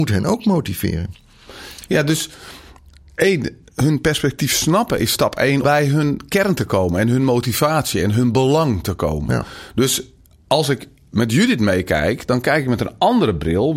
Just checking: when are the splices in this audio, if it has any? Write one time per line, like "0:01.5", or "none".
0:05.6

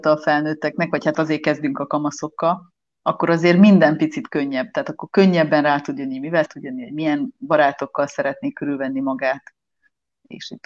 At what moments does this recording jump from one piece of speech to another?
0:01.1
0:06.5

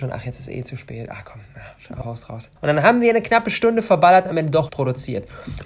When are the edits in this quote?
0:02.0
0:02.6
0:04.7

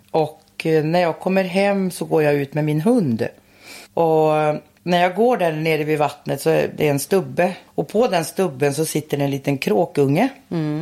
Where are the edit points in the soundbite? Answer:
0:03.9
0:07.7

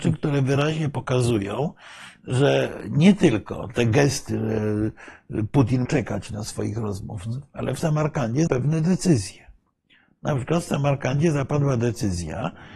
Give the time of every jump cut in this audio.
0:05.9
0:08.5

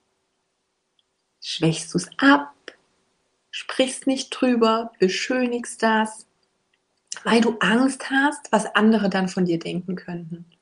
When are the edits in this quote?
none

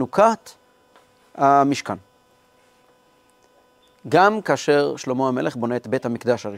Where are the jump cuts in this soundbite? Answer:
none

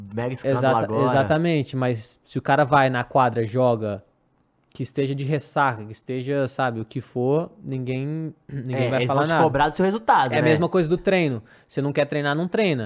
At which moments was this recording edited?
none

